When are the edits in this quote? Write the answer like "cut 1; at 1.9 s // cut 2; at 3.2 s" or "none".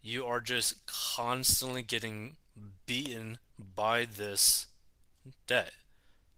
none